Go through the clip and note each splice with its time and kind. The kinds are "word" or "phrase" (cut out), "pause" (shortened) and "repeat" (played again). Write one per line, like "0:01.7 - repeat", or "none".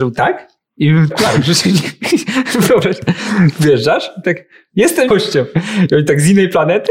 0:01.1 - word
0:04.2 - word
0:05.1 - word